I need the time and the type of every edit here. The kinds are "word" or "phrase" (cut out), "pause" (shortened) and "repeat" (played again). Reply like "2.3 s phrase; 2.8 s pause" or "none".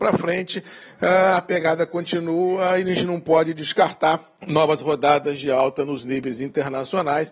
4.4 s pause